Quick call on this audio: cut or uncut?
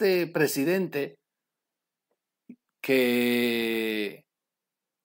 uncut